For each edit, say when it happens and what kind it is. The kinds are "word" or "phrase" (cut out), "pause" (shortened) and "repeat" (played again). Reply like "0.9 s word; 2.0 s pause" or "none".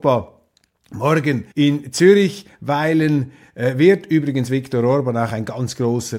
1.5 s pause